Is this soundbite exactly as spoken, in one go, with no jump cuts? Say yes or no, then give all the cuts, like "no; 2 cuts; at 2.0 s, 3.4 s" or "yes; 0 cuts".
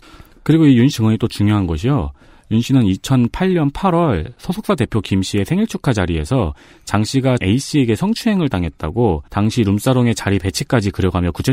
no; 3 cuts; at 0.9 s, 7.4 s, 9.3 s